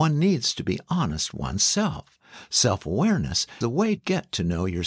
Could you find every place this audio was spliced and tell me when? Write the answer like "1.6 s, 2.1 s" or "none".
1.3 s, 3.6 s, 4.0 s